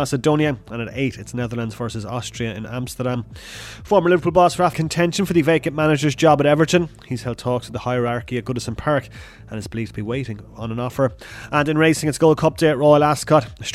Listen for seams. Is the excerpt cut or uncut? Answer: cut